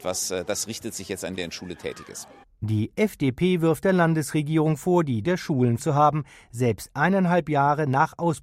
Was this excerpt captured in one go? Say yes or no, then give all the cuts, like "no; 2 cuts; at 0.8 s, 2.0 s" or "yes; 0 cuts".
no; 3 cuts; at 1.4 s, 5.2 s, 5.8 s